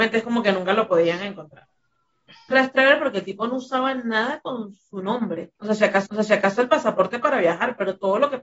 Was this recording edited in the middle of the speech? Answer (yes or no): yes